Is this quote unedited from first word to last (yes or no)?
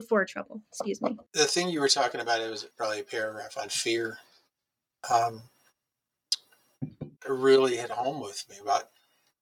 no